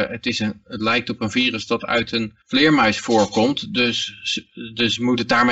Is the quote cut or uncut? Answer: cut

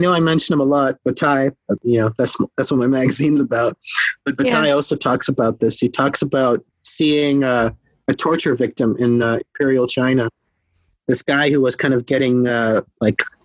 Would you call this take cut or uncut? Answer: uncut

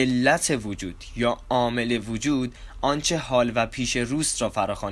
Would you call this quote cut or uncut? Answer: uncut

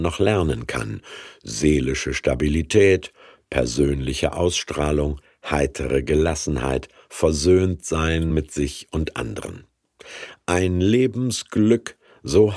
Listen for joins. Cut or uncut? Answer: uncut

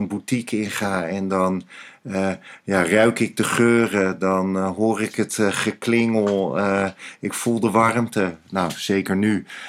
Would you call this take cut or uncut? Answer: uncut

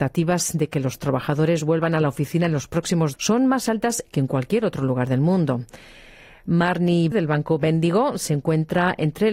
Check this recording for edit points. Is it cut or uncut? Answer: cut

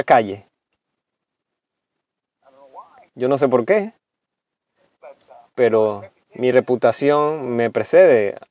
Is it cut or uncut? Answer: uncut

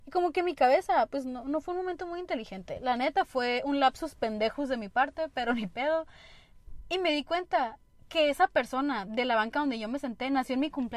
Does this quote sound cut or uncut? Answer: uncut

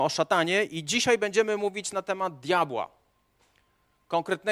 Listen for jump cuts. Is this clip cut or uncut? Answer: uncut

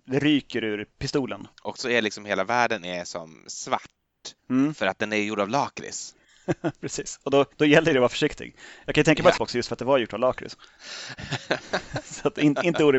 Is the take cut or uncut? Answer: cut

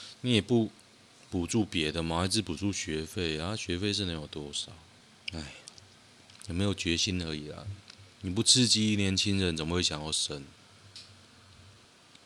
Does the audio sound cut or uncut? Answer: cut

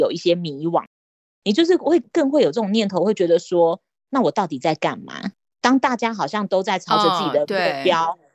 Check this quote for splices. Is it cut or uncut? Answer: uncut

